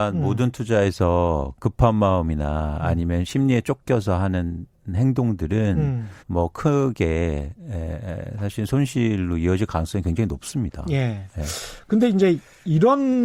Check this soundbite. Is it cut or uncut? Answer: cut